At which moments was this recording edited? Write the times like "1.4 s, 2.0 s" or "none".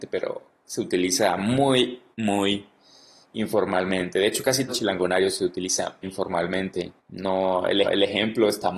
2.1 s, 4.7 s, 6.0 s, 7.0 s, 7.8 s